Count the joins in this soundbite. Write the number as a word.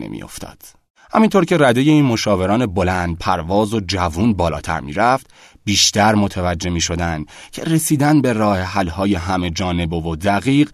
zero